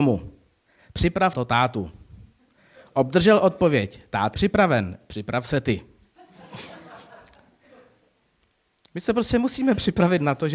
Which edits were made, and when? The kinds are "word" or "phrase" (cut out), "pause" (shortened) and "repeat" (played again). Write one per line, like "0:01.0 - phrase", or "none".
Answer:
0:01.3 - word
0:04.3 - word